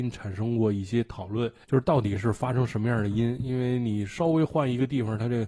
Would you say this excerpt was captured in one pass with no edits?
no; 1 cut; at 1.6 s

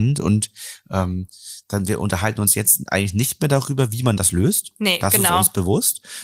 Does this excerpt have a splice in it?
no; 0 cuts

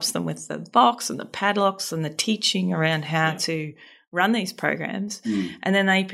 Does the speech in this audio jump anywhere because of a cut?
no; 0 cuts

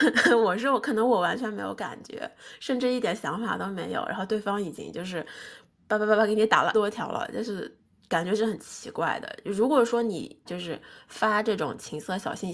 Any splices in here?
yes; 2 cuts; at 6.7 s, 10.5 s

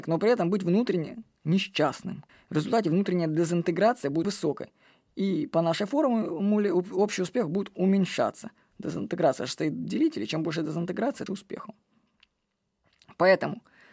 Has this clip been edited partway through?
yes; 3 cuts; at 2.3 s, 4.2 s, 11.3 s

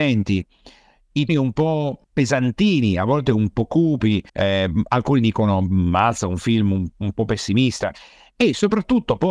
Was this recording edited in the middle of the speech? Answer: yes; 3 cuts; at 1.3 s, 2.0 s, 4.3 s

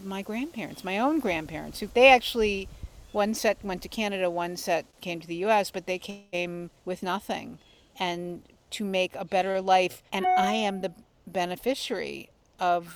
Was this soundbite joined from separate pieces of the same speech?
yes; 4 cuts; at 1.9 s, 6.8 s, 8.7 s, 10.1 s

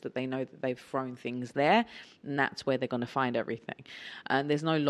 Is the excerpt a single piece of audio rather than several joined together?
yes; 0 cuts

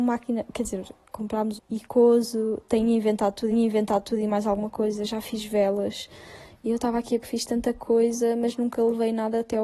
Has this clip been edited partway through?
yes; 3 cuts; at 1.6 s, 3.5 s, 7.2 s

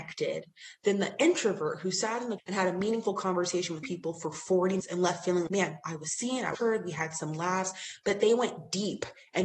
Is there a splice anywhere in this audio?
yes; 5 cuts; at 2.4 s, 3.8 s, 4.8 s, 5.5 s, 6.5 s

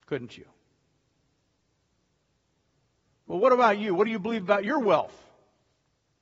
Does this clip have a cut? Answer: no; 0 cuts

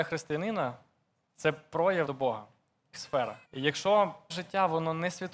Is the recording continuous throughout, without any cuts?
no; 4 cuts; at 2.1 s, 2.9 s, 3.4 s, 4.3 s

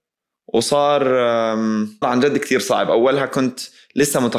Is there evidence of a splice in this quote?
yes; 1 cut; at 2.0 s

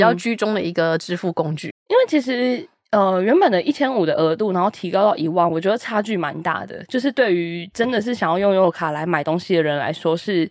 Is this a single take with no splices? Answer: no; 1 cut; at 1.7 s

